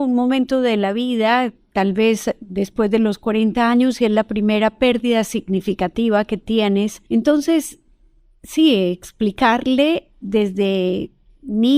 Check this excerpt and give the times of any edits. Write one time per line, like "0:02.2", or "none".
0:07.1